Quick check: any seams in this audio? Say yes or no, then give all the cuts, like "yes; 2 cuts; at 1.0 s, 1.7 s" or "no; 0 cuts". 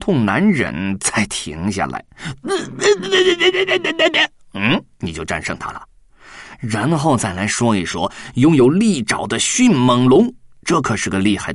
no; 0 cuts